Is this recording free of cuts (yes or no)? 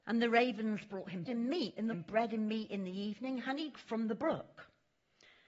no